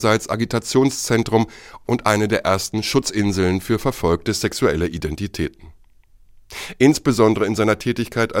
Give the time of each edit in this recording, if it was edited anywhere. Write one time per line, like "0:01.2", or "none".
none